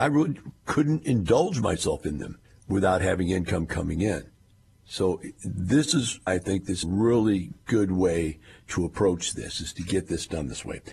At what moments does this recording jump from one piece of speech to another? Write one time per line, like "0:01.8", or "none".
0:02.4
0:06.3
0:06.8